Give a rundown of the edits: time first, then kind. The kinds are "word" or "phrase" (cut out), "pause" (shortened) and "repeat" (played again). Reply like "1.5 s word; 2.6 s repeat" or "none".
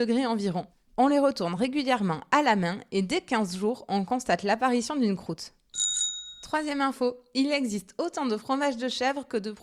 none